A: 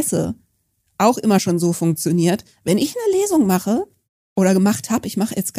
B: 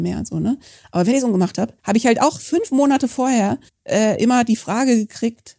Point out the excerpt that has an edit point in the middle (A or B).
B